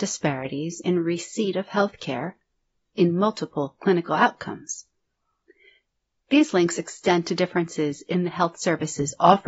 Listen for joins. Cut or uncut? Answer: uncut